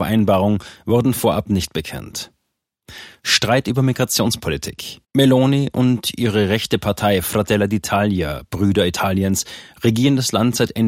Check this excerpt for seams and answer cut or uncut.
cut